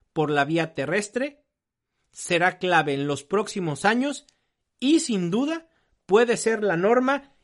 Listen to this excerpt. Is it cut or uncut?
uncut